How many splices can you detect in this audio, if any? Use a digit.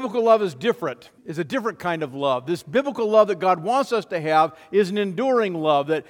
1